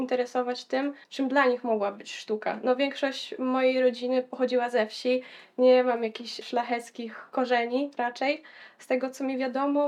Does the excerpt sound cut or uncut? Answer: cut